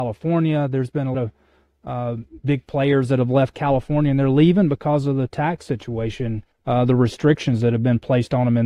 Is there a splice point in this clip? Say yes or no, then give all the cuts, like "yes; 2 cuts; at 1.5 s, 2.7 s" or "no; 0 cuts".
yes; 2 cuts; at 1.1 s, 6.5 s